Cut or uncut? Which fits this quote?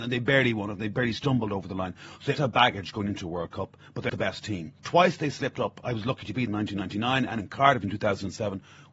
cut